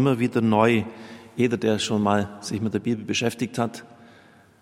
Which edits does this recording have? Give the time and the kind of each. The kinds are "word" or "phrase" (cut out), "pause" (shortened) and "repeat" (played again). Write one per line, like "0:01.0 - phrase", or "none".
none